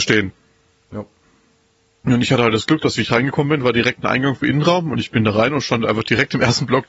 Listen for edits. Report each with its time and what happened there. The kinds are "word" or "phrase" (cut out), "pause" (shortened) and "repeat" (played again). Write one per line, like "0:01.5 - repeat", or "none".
none